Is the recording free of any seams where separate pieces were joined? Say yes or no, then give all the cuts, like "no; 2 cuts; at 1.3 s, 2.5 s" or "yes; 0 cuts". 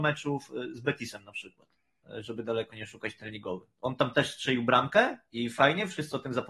yes; 0 cuts